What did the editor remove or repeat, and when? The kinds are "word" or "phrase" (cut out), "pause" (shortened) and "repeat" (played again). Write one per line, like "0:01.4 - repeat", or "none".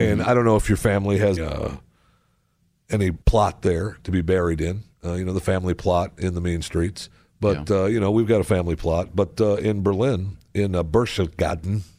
0:01.4 - word
0:03.2 - pause
0:04.9 - pause